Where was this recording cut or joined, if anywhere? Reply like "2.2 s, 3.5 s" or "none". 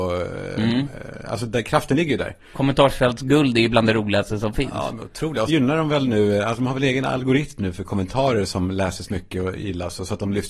5.5 s